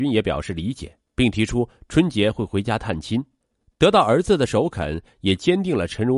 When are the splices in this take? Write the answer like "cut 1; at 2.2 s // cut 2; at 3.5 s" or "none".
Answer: cut 1; at 1.1 s // cut 2; at 3.4 s